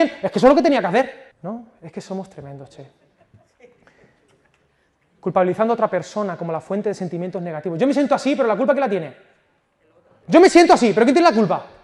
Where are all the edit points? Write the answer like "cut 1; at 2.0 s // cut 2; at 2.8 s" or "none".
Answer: cut 1; at 1.3 s